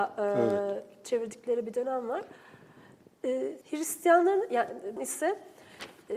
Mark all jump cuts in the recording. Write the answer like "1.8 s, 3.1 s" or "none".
3.6 s, 5.0 s